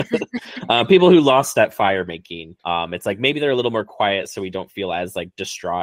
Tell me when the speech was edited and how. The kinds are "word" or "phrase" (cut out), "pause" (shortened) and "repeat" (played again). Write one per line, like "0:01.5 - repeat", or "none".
0:02.6 - pause